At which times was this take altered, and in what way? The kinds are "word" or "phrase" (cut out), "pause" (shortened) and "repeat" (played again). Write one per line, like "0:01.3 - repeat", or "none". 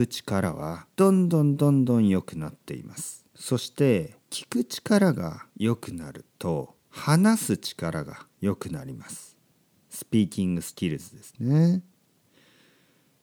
0:00.9 - pause
0:03.3 - pause
0:04.2 - pause
0:05.5 - pause
0:06.8 - pause
0:08.3 - pause